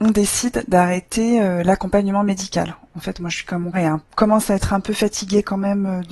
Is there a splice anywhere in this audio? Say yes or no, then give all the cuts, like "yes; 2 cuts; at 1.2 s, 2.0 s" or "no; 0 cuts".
yes; 2 cuts; at 3.7 s, 4.0 s